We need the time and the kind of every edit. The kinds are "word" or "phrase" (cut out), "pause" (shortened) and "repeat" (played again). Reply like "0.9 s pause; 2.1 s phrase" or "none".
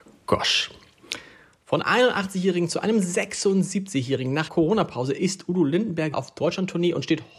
1.8 s word; 4.5 s word; 6.1 s word